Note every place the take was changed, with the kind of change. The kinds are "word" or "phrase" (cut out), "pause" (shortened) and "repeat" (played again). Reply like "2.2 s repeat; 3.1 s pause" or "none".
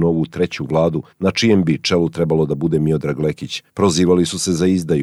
1.1 s pause; 3.7 s pause